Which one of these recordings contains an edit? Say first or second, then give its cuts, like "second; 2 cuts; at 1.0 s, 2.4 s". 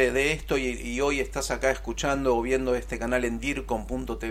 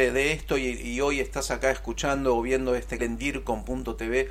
second; 1 cut; at 3.0 s